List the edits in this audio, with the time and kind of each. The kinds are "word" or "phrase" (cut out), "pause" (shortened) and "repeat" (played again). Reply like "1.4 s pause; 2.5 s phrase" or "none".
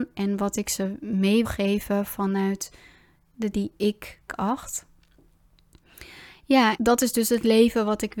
1.4 s word; 3.5 s word; 4.3 s word; 6.8 s word